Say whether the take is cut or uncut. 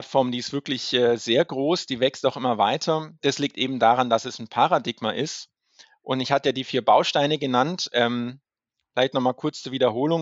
uncut